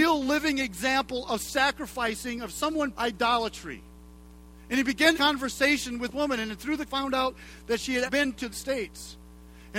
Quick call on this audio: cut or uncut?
cut